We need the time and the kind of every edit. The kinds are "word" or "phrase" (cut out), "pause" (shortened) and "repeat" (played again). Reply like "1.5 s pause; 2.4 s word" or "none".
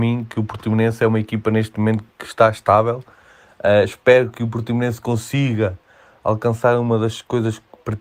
none